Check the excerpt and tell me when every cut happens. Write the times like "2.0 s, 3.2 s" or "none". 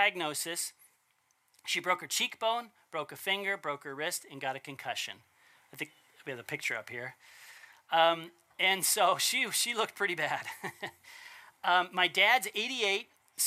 none